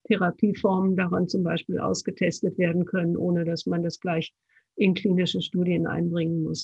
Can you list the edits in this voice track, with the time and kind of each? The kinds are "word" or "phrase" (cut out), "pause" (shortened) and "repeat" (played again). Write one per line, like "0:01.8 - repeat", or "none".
none